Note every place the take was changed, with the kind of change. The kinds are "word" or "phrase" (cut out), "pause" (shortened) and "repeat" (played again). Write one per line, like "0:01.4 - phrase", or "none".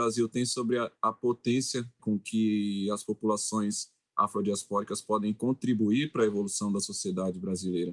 0:02.0 - word